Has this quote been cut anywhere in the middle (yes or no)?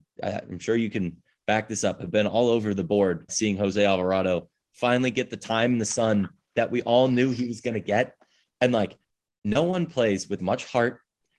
yes